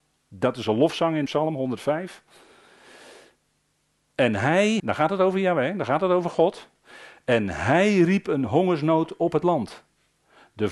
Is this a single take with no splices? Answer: no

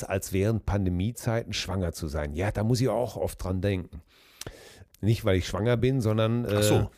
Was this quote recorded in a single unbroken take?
yes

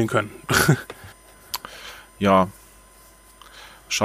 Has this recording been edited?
yes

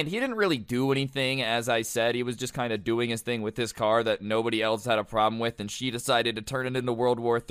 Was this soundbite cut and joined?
no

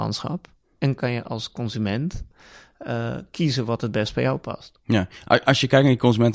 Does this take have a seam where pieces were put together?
no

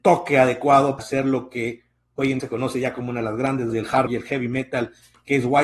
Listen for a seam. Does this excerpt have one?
yes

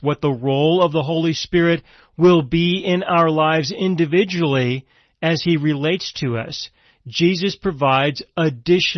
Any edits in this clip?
no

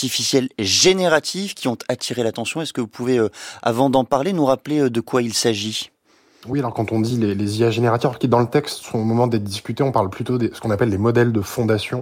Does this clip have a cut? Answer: no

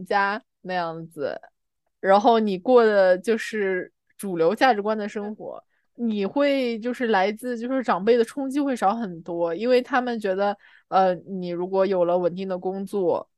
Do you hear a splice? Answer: no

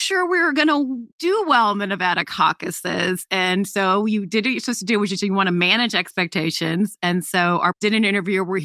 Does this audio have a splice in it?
yes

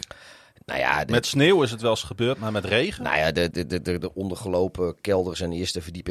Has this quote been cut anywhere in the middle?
yes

